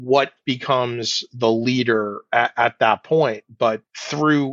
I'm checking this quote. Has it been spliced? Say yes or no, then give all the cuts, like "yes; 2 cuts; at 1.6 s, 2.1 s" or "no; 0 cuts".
no; 0 cuts